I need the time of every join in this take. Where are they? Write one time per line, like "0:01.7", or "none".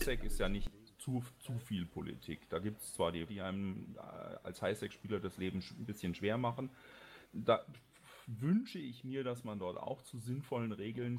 0:03.3
0:07.3

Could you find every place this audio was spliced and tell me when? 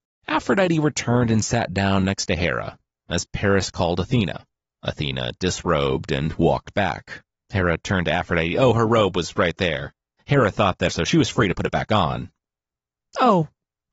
0:10.9

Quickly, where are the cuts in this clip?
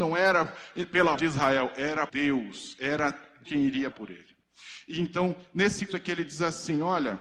0:01.1
0:02.1
0:03.4
0:03.9
0:05.9

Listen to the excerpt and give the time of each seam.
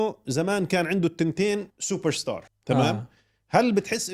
0:01.7
0:02.5

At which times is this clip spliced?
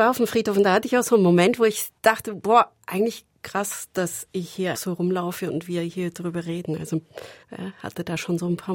0:02.0
0:04.7
0:07.4

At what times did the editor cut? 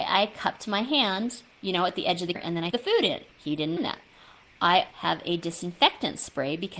0:01.5
0:02.3
0:02.7
0:03.3
0:03.8
0:04.9

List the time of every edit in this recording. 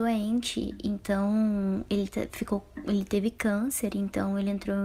none

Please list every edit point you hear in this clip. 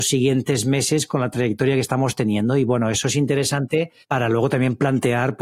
0:04.0

